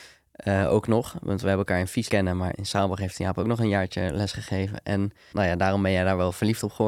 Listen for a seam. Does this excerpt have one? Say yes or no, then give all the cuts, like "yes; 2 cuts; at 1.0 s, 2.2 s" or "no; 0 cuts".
yes; 3 cuts; at 2.1 s, 2.5 s, 5.3 s